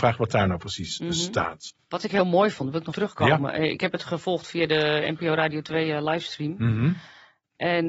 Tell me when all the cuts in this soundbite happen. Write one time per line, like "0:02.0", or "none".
0:02.9